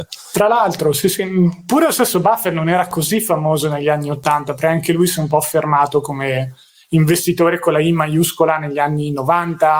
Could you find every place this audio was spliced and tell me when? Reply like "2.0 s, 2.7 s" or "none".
none